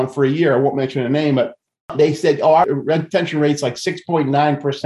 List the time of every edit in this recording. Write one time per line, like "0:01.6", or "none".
none